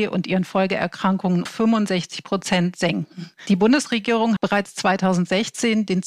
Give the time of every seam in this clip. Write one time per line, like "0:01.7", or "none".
0:01.5
0:04.4